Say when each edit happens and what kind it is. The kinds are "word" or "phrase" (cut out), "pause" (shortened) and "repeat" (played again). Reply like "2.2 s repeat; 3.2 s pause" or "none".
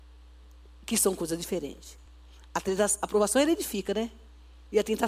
none